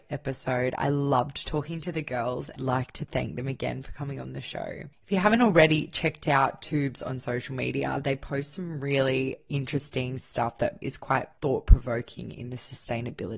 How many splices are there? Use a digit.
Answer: 2